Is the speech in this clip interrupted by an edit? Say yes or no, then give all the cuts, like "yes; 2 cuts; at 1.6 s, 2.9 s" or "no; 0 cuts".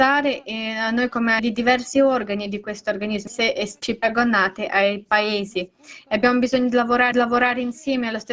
yes; 3 cuts; at 1.4 s, 3.3 s, 7.1 s